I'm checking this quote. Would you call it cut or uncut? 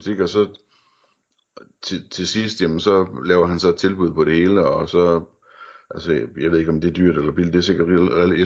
uncut